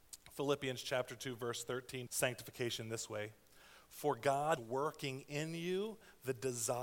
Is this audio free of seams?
no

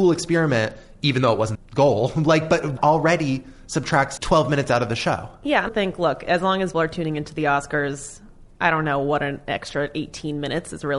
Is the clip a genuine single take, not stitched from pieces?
no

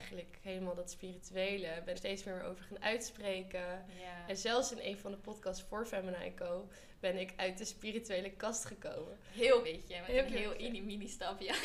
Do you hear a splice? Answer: yes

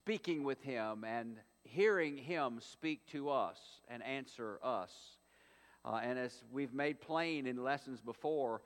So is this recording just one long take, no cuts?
yes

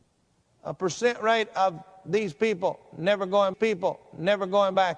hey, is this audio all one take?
no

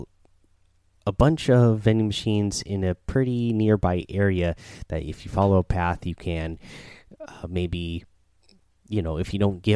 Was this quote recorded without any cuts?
yes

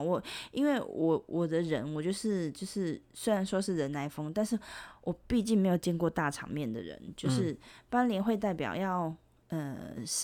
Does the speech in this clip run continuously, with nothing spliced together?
yes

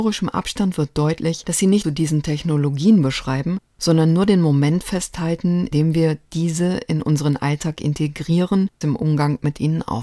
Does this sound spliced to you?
yes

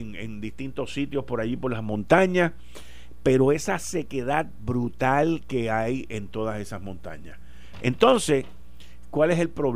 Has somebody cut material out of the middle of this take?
no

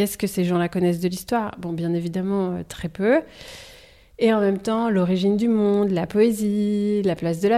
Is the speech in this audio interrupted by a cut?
no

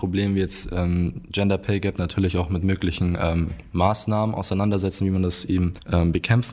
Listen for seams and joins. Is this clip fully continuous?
yes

